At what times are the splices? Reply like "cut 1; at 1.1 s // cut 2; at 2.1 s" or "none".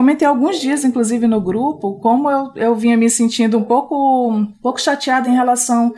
none